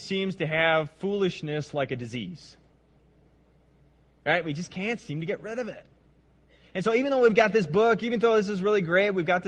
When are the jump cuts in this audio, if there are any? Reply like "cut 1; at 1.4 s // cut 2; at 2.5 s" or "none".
none